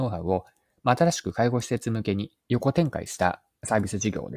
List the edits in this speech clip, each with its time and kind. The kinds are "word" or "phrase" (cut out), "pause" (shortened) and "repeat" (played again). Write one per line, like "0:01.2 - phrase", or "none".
0:02.4 - pause